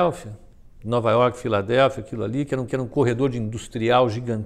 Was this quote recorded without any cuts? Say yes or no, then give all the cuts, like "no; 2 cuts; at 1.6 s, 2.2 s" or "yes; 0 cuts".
no; 1 cut; at 2.7 s